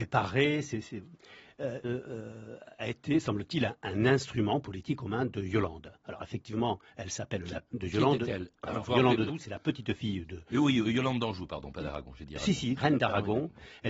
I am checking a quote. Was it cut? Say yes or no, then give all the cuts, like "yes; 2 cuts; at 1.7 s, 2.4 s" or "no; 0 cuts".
yes; 5 cuts; at 1.8 s, 2.8 s, 7.7 s, 9.3 s, 12.8 s